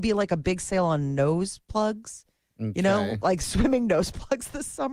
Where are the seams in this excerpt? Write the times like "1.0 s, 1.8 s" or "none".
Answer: none